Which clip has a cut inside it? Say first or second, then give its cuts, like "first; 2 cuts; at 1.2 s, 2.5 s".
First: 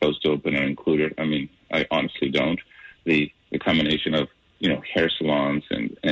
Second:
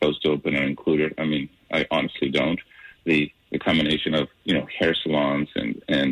second; 1 cut; at 4.3 s